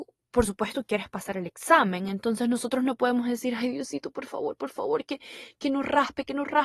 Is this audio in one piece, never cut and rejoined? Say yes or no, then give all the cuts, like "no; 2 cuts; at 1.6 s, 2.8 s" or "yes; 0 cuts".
yes; 0 cuts